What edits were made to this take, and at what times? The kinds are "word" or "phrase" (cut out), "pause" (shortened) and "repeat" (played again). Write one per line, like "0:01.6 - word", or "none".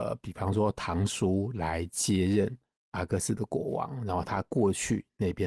none